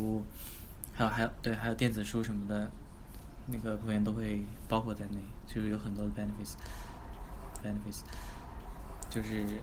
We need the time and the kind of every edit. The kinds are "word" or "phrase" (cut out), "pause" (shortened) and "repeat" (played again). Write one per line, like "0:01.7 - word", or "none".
0:03.8 - word
0:07.6 - repeat